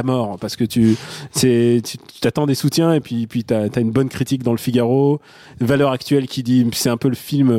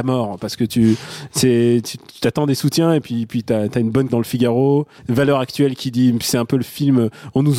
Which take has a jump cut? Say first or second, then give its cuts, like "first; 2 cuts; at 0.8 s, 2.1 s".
second; 2 cuts; at 4.1 s, 5.0 s